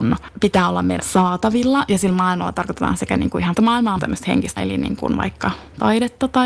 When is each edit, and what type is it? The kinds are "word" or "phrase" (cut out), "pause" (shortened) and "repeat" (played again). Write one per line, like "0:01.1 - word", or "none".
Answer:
0:01.0 - word
0:03.5 - word
0:04.0 - phrase
0:04.6 - word